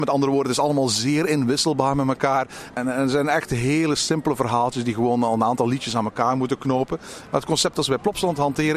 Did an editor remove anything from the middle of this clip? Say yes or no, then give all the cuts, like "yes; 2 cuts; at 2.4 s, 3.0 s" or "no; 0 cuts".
no; 0 cuts